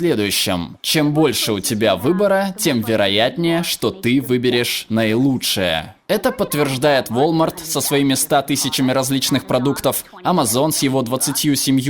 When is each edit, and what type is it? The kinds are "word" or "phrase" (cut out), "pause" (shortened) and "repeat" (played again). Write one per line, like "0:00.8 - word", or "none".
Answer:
none